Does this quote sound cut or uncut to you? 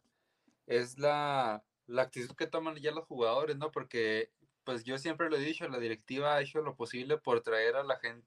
uncut